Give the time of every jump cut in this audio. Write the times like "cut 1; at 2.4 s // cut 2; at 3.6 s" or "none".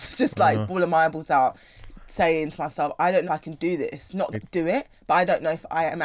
cut 1; at 3.3 s // cut 2; at 4.3 s // cut 3; at 4.9 s